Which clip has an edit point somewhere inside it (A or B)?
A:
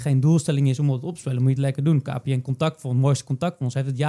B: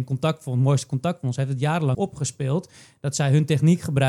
B